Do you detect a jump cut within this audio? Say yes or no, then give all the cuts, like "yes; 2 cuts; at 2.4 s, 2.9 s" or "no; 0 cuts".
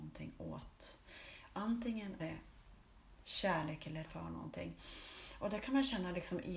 yes; 2 cuts; at 2.2 s, 4.0 s